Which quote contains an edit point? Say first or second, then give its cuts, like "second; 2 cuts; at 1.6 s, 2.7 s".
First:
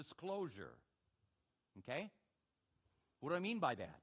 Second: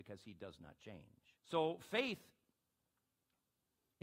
second; 1 cut; at 1.4 s